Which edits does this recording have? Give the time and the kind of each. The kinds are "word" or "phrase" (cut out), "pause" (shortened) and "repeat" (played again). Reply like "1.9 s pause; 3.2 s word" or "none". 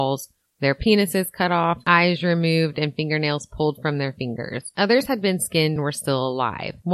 5.8 s word